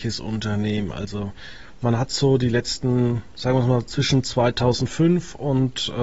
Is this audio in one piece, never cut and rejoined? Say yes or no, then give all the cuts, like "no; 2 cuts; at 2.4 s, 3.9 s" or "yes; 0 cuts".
yes; 0 cuts